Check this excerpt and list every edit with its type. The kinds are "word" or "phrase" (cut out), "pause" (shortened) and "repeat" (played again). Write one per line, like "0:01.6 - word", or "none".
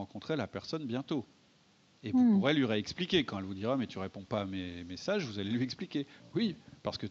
none